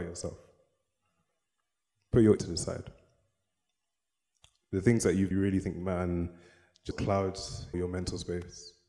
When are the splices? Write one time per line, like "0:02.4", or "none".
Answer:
0:02.4
0:05.3
0:06.9
0:07.7